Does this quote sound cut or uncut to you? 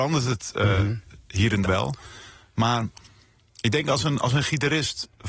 cut